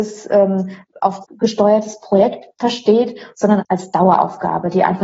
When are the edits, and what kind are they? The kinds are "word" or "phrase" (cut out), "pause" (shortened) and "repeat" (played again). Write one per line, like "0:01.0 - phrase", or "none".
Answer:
0:01.2 - word
0:02.5 - pause
0:03.6 - word